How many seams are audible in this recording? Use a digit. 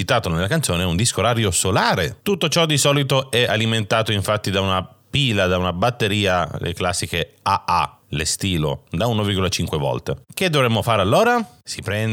1